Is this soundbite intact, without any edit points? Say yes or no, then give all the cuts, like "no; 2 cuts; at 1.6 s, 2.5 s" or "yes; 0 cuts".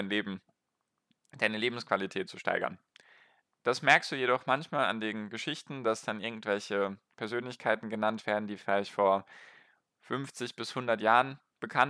yes; 0 cuts